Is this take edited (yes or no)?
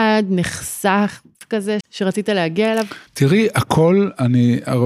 yes